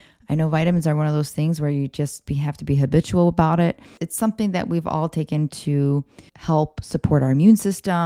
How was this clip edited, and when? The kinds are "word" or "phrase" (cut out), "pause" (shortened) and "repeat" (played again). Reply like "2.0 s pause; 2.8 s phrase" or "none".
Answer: 3.8 s pause; 6.3 s pause